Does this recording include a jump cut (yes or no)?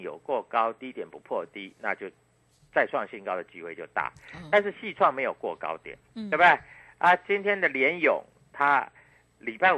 no